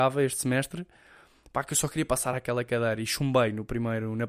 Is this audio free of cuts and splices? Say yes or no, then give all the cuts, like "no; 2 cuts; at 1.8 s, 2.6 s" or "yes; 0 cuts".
yes; 0 cuts